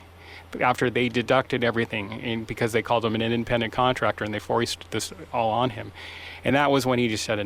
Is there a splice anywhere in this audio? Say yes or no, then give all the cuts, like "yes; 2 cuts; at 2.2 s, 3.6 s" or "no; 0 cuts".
no; 0 cuts